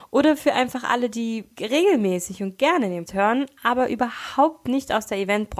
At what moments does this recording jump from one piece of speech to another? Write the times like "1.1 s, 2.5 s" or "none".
1.5 s, 3.1 s